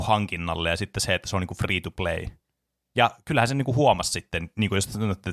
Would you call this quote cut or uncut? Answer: uncut